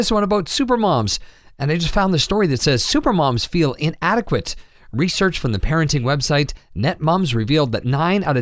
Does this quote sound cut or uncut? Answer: uncut